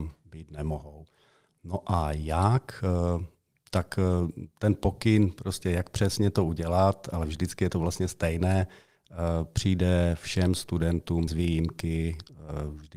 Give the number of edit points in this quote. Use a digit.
1